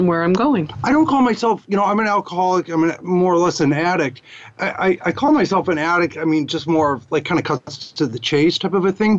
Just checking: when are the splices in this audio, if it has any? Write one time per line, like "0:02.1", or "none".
none